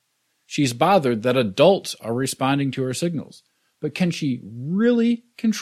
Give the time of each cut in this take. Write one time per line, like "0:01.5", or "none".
none